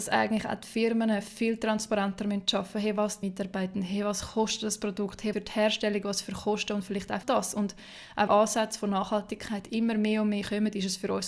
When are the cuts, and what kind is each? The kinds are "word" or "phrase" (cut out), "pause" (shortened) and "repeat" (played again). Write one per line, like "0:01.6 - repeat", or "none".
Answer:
0:03.2 - phrase
0:05.3 - phrase
0:07.2 - phrase
0:08.3 - phrase